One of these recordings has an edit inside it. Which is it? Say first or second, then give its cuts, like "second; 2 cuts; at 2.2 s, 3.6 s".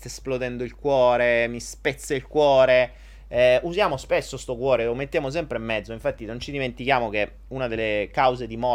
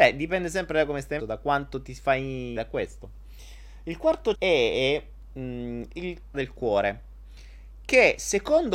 second; 4 cuts; at 1.2 s, 2.6 s, 4.3 s, 6.3 s